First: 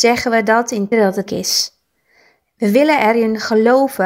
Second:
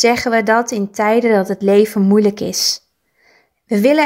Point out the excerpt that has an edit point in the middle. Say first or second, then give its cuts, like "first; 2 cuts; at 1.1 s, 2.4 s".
first; 2 cuts; at 0.9 s, 1.3 s